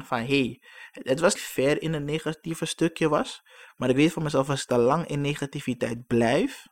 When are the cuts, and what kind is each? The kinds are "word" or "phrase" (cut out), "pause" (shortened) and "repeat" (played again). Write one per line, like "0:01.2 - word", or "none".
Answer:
0:01.3 - phrase